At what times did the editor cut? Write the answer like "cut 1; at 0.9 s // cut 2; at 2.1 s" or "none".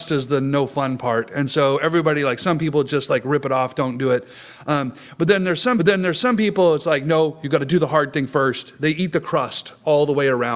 cut 1; at 5.8 s